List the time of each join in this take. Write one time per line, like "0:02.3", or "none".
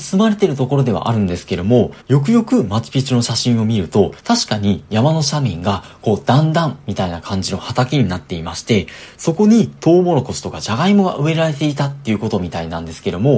0:02.0
0:04.2

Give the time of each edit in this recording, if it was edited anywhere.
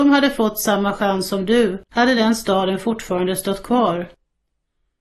0:01.9

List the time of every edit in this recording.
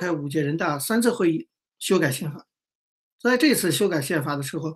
none

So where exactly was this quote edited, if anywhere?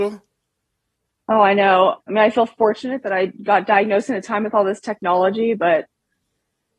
0:02.0
0:03.4

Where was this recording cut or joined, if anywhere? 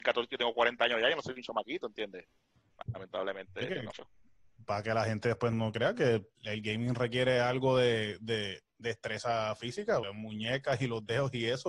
0:03.9
0:05.5
0:06.4
0:08.6
0:10.0

